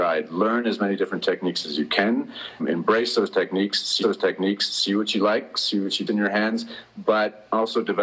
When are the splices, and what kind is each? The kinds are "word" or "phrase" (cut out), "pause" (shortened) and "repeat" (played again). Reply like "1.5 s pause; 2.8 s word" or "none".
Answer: 2.6 s word; 4.0 s repeat; 6.1 s phrase

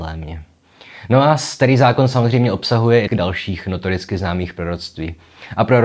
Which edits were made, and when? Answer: 3.1 s word

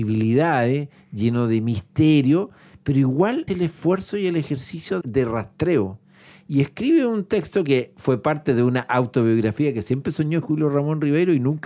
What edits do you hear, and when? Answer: 3.5 s word; 5.0 s word; 10.4 s word

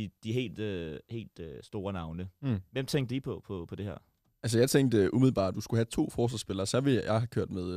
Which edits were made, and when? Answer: 5.5 s phrase

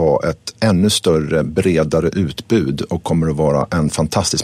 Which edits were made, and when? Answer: none

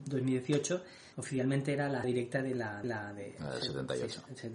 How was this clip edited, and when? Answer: 1.1 s pause; 2.0 s word; 2.8 s repeat

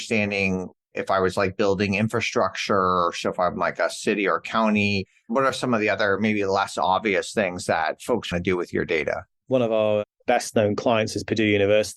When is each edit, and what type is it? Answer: 8.3 s phrase; 9.3 s pause

